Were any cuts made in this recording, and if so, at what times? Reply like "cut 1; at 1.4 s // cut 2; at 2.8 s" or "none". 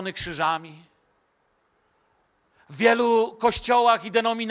none